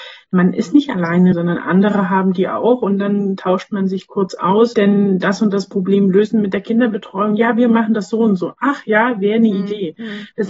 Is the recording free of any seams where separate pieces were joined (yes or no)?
no